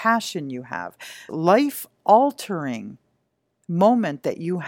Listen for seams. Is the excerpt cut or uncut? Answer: cut